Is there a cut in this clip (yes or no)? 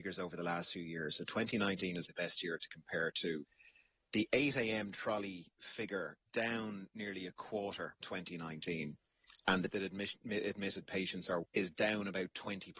yes